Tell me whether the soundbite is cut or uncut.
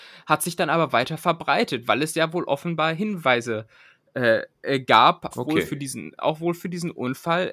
cut